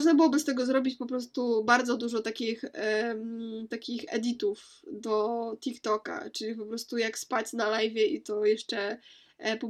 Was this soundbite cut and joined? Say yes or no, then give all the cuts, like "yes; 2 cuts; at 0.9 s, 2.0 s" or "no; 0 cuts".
no; 0 cuts